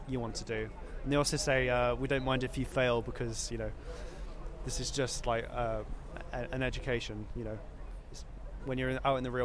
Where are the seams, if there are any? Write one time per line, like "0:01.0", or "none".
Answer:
none